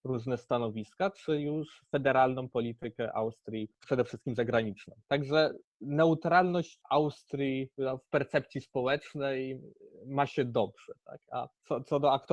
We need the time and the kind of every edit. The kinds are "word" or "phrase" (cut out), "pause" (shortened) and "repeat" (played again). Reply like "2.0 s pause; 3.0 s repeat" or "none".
3.8 s phrase; 5.0 s pause